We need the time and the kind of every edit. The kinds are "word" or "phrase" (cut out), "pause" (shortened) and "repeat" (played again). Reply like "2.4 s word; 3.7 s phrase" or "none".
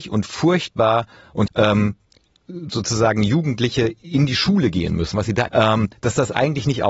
1.5 s word; 2.2 s pause; 5.5 s word